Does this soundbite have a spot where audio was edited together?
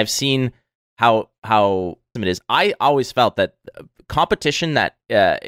yes; 1 cut; at 2.2 s

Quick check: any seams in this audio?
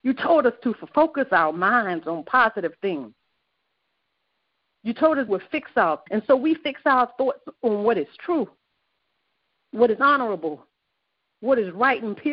yes; 2 cuts; at 5.3 s, 6.1 s

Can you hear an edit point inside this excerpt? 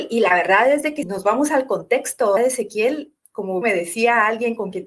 yes; 3 cuts; at 1.0 s, 2.4 s, 3.6 s

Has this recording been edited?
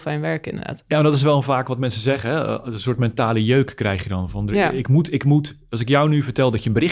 no; 0 cuts

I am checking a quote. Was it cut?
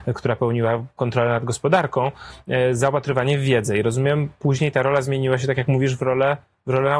no; 0 cuts

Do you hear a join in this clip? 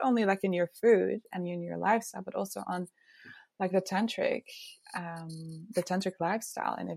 no; 0 cuts

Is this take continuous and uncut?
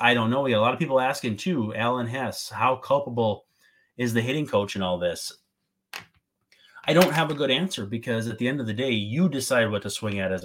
yes; 0 cuts

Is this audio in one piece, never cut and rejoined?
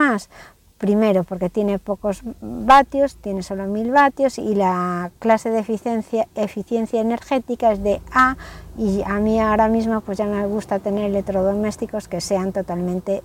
no; 1 cut; at 5.2 s

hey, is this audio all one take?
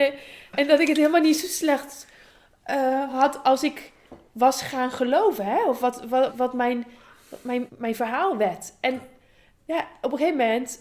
no; 3 cuts; at 6.3 s, 7.7 s, 9.6 s

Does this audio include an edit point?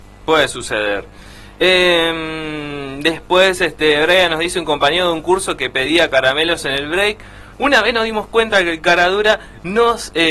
yes; 1 cut; at 7.5 s

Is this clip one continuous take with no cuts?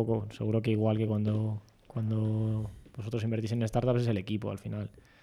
yes; 0 cuts

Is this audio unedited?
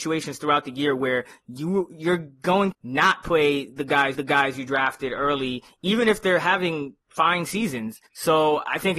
no; 3 cuts; at 2.7 s, 4.1 s, 8.1 s

